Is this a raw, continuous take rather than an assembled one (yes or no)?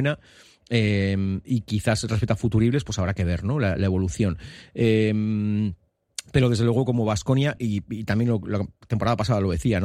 yes